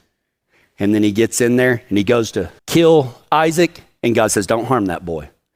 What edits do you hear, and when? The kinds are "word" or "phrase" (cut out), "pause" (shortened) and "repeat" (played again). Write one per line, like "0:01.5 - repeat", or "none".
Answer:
0:02.6 - pause